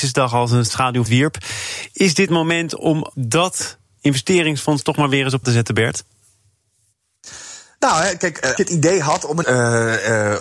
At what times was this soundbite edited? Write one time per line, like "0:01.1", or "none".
0:01.1
0:02.3
0:03.1
0:05.4
0:08.6
0:09.4